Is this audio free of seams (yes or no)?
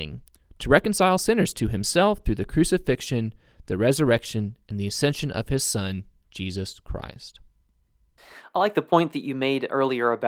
yes